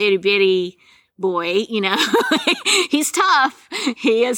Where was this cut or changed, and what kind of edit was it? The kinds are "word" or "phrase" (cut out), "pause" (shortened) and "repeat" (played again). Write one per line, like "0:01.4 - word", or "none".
none